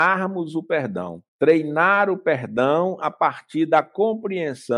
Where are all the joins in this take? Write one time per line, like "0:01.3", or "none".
0:01.3

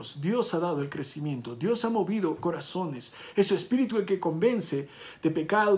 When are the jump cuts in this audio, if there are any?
none

